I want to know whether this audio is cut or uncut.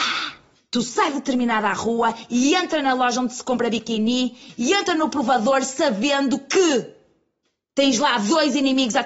uncut